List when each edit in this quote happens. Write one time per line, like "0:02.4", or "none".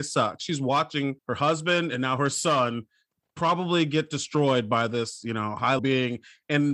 0:01.2
0:05.8